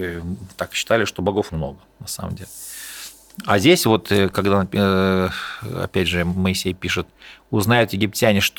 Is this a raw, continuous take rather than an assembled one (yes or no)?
no